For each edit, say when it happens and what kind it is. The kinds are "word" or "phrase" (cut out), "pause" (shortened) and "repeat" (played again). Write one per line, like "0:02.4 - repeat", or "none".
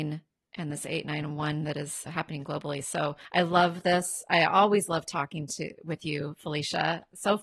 0:02.1 - word
0:03.2 - pause